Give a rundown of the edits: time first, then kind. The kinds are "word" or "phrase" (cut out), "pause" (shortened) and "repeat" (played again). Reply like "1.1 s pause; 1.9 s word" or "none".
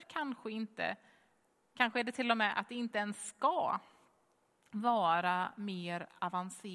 none